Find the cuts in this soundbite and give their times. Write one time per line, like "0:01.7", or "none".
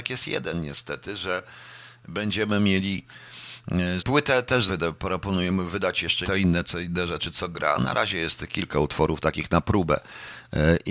0:04.0
0:04.7
0:06.2

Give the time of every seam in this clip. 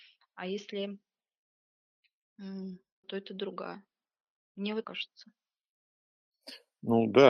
0:03.0
0:04.8

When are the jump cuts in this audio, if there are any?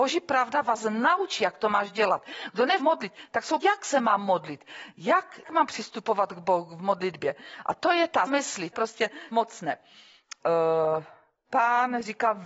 0:02.8
0:03.6
0:05.4
0:08.3
0:08.7
0:09.3

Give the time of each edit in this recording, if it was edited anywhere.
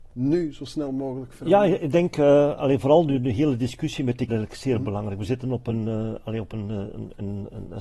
0:04.3

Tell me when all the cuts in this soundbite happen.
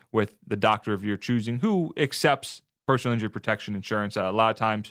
none

